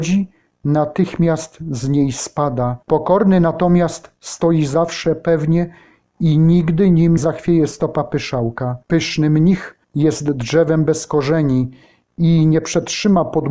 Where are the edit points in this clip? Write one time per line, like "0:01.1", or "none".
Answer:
0:02.8
0:07.2
0:08.8
0:09.8